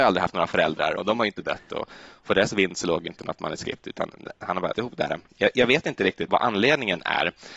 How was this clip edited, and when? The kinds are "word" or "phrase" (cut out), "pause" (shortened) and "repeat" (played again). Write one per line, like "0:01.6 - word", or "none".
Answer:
0:01.0 - word
0:02.2 - word
0:04.7 - word
0:06.3 - word